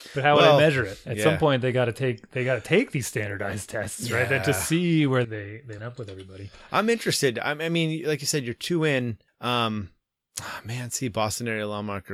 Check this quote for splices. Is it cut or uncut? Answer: cut